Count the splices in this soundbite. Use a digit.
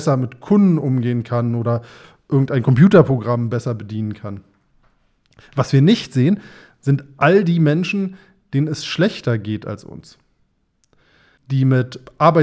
0